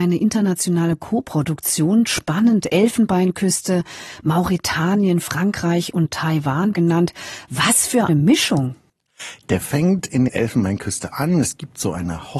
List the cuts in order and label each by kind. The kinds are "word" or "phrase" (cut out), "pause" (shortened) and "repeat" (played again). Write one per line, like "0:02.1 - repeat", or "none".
0:06.7 - phrase
0:08.1 - word
0:09.6 - word
0:10.3 - word

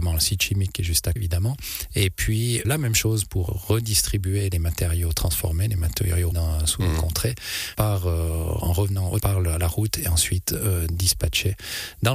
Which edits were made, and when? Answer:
0:01.2 - word
0:02.6 - word
0:03.5 - word
0:06.3 - word
0:07.7 - word
0:09.2 - word

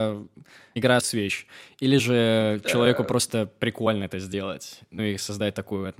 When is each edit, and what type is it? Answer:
0:01.0 - word

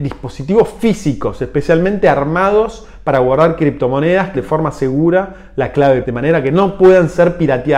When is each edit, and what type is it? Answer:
0:04.3 - word
0:06.0 - word

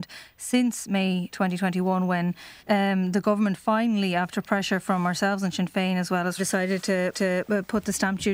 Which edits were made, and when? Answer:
0:01.3 - word
0:02.6 - pause
0:06.4 - phrase
0:07.1 - repeat

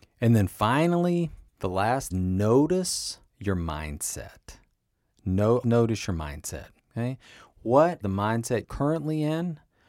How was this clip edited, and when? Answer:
0:01.5 - pause
0:02.1 - phrase
0:03.3 - pause
0:05.6 - word
0:06.8 - pause
0:08.0 - word
0:08.6 - word

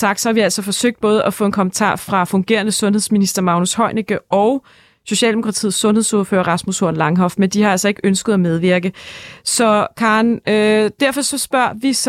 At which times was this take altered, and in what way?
none

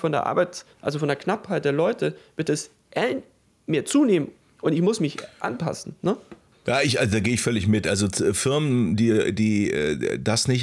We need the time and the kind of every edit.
0:03.5 - pause
0:04.4 - pause
0:06.5 - pause

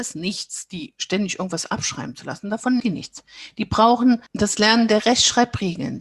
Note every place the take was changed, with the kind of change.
0:02.8 - word
0:04.3 - pause

